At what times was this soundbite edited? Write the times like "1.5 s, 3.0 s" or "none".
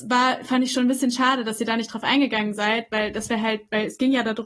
none